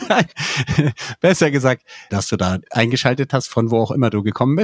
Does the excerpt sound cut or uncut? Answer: cut